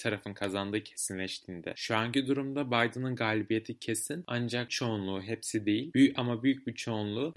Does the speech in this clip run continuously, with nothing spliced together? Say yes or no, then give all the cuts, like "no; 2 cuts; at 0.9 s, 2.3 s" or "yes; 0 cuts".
no; 1 cut; at 4.7 s